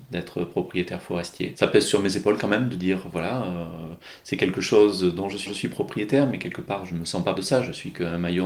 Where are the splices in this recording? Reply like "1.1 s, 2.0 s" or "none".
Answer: 5.5 s, 7.4 s